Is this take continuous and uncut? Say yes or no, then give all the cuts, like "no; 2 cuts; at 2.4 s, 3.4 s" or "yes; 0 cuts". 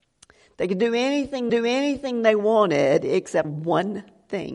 no; 2 cuts; at 1.5 s, 3.4 s